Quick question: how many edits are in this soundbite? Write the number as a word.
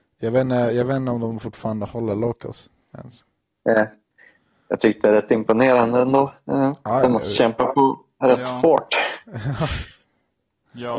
zero